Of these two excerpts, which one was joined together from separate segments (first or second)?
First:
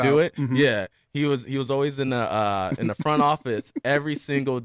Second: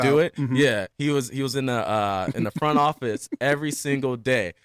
second